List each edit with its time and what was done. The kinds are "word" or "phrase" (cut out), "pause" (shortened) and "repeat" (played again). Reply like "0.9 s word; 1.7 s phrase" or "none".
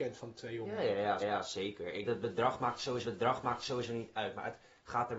1.2 s repeat; 2.0 s word; 3.0 s repeat